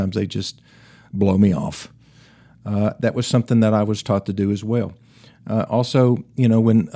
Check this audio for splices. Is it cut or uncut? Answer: uncut